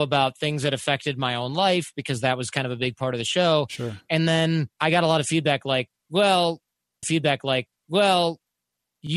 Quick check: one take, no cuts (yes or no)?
no